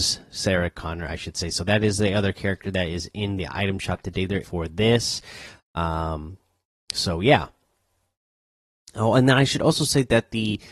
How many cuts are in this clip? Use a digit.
1